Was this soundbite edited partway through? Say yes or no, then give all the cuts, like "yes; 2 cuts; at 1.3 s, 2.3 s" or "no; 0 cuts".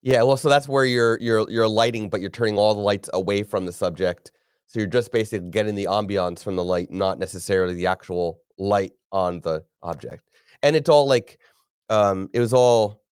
no; 0 cuts